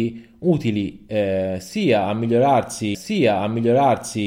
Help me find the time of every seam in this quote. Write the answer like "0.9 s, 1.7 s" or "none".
2.9 s